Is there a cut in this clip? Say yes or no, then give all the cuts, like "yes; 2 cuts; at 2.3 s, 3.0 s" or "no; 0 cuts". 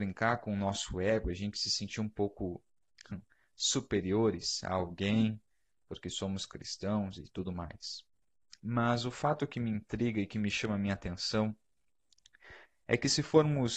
no; 0 cuts